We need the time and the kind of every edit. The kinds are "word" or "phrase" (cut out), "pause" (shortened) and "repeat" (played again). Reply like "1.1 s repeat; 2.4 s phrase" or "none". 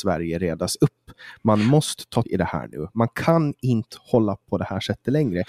2.2 s word; 4.4 s word